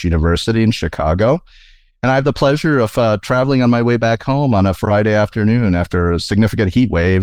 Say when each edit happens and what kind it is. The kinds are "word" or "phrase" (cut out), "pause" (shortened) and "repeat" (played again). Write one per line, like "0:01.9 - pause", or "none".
none